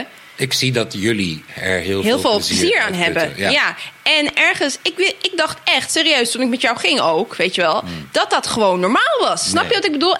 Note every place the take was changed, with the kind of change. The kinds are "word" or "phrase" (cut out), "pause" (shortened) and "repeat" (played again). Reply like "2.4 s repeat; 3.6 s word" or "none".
none